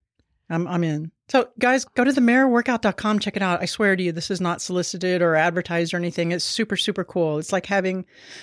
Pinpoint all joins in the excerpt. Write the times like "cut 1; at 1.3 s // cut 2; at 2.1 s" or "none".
cut 1; at 1.2 s